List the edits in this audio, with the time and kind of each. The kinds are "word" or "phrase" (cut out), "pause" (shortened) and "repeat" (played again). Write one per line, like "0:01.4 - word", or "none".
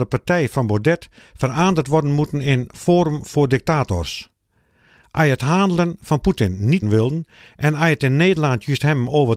0:06.8 - word